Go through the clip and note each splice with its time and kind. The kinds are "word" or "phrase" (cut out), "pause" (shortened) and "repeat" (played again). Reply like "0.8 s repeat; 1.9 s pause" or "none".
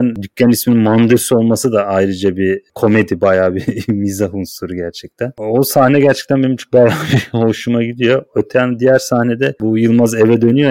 none